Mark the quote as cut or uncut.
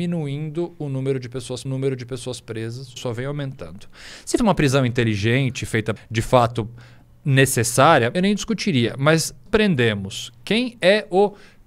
cut